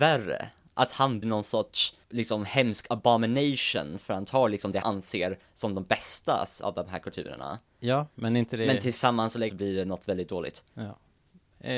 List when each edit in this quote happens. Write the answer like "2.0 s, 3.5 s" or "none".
1.2 s, 2.0 s, 4.8 s, 9.5 s